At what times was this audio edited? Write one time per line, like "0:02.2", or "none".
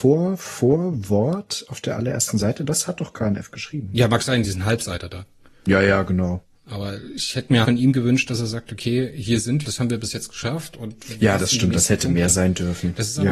0:04.4
0:07.6
0:09.6

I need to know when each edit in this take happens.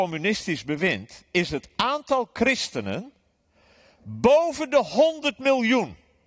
none

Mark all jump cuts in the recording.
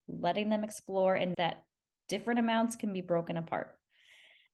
0:01.3

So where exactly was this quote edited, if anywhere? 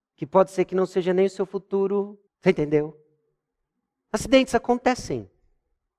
0:02.3

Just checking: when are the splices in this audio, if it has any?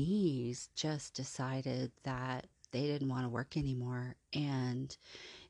none

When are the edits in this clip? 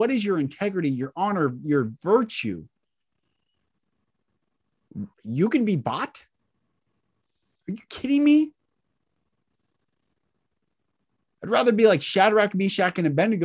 0:05.1

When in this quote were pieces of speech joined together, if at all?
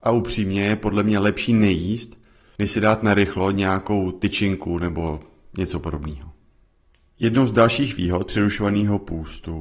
none

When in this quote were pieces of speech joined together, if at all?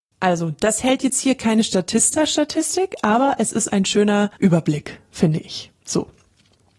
0:04.4

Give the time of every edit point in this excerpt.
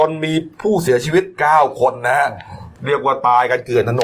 0:02.8

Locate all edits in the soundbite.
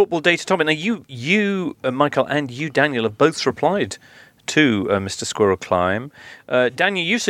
none

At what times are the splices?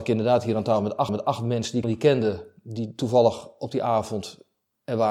0:01.1
0:01.8

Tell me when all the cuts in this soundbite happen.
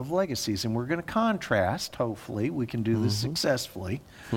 none

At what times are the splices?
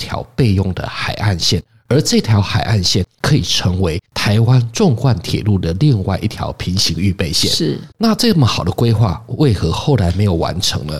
0:04.1
0:07.9

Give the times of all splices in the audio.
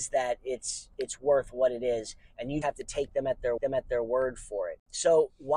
0:02.6
0:03.6

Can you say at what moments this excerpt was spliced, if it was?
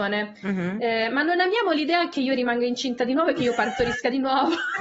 none

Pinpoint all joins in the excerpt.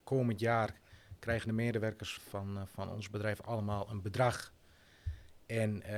0:02.2

